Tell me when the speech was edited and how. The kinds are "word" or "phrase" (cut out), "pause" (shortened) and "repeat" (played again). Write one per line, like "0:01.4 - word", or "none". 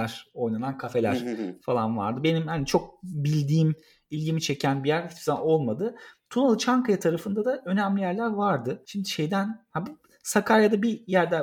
none

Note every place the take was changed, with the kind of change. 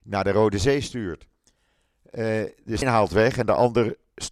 0:02.8 - word

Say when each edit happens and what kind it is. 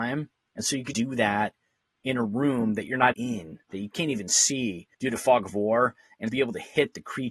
0:00.9 - word
0:03.1 - word
0:04.9 - pause
0:06.3 - word

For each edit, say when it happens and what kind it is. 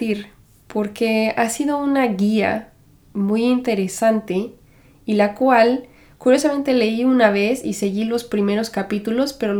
none

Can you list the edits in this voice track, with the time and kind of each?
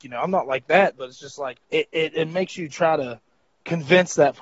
0:01.6 - pause

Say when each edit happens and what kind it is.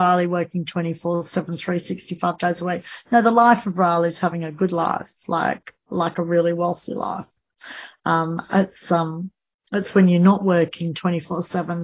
none

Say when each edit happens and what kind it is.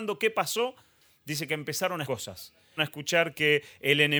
0:02.1 - word
0:02.8 - word

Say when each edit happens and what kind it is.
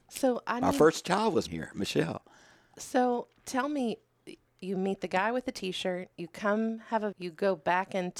0:01.5 - word
0:04.5 - word
0:06.1 - pause
0:07.1 - word

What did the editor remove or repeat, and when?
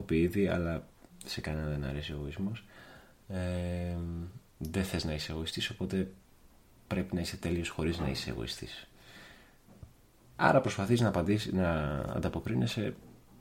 none

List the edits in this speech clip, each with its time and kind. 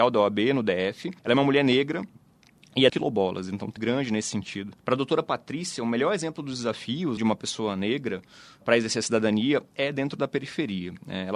0:01.2 - pause
0:02.9 - phrase
0:03.8 - phrase
0:04.8 - pause
0:07.2 - word
0:08.6 - word

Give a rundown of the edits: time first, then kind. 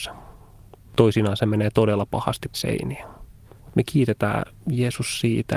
0:02.5 - word

